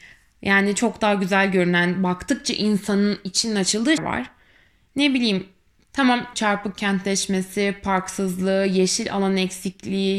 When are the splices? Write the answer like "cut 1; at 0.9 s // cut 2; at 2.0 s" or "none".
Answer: cut 1; at 4.0 s // cut 2; at 6.3 s